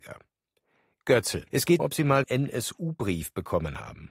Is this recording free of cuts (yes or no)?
no